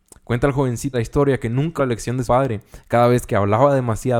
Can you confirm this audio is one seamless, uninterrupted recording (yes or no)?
no